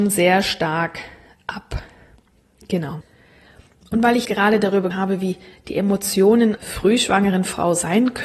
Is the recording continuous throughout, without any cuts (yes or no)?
no